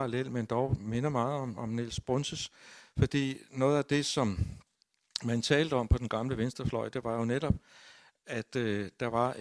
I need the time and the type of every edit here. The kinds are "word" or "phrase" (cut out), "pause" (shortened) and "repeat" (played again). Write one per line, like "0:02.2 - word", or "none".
none